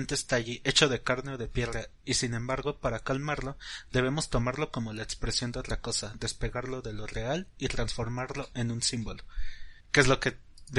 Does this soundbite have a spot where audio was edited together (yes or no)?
yes